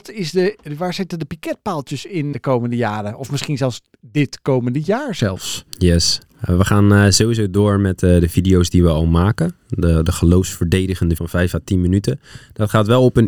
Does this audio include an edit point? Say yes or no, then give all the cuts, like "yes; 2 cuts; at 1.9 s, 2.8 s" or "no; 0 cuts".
yes; 2 cuts; at 2.3 s, 11.2 s